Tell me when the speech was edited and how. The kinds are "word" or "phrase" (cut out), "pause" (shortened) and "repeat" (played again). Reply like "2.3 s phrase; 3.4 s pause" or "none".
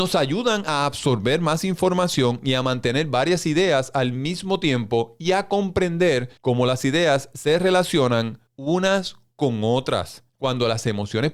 6.4 s pause; 8.5 s pause; 10.3 s pause

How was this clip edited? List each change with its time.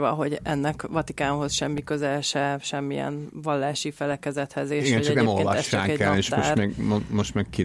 none

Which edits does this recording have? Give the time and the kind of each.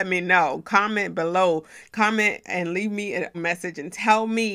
3.3 s word

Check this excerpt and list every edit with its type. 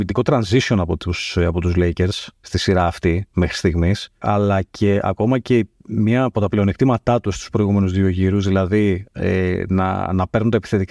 none

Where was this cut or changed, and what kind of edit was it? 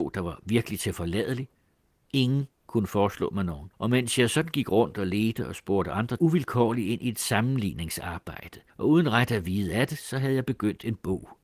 3.7 s pause; 6.2 s phrase; 8.7 s pause

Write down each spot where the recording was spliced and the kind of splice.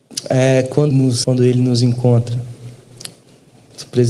0.9 s word; 1.2 s word

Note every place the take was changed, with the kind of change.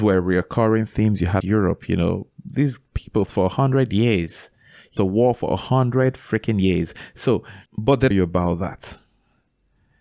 1.4 s word; 3.3 s word; 5.0 s phrase; 7.7 s pause; 8.1 s phrase

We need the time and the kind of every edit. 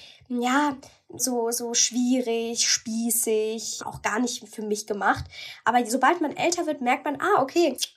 1.2 s word; 3.8 s word

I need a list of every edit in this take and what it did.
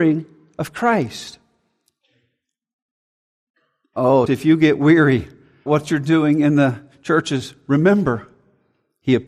4.3 s word; 5.7 s word

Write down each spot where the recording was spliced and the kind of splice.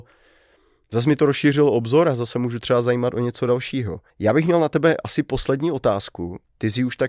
4.1 s pause

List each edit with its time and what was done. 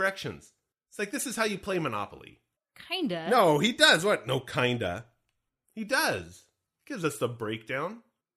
none

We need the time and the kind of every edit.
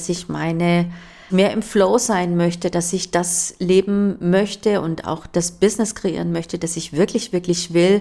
1.3 s phrase

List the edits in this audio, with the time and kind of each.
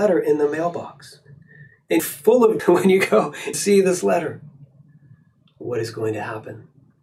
2.0 s word; 2.6 s word; 3.5 s word

